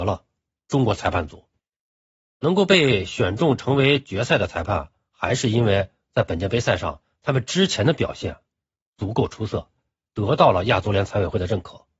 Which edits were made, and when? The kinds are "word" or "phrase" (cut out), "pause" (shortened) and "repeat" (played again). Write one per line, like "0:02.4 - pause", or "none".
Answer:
none